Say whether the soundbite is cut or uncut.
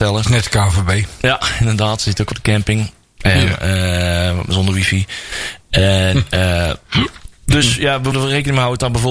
cut